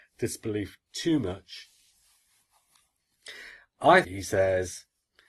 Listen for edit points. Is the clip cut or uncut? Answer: cut